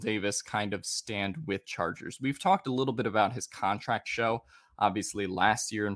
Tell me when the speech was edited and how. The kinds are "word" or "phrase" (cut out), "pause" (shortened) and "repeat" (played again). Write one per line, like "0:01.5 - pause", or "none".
0:01.6 - word
0:04.0 - phrase